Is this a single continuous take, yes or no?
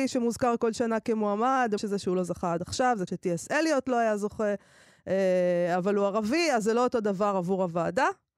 no